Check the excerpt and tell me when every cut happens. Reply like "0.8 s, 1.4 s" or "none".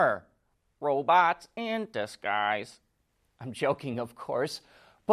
none